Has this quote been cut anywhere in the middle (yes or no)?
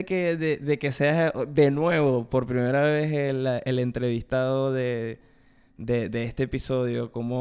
no